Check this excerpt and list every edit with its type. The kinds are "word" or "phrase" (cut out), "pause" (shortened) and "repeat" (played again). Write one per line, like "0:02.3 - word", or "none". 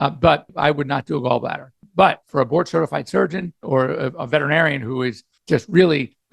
none